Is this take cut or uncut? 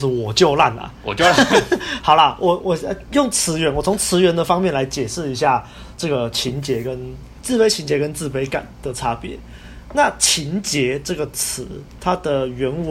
cut